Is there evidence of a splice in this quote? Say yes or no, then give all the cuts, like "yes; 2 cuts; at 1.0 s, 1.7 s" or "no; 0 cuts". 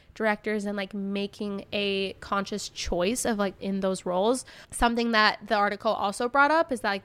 yes; 1 cut; at 3.6 s